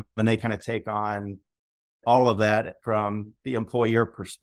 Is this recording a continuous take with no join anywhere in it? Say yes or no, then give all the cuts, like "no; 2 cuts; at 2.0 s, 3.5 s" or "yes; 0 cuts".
yes; 0 cuts